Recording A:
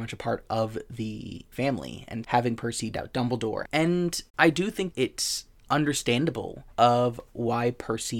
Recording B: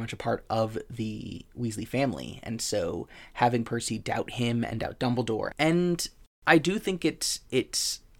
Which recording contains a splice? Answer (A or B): A